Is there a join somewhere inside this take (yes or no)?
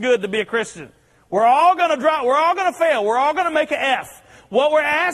no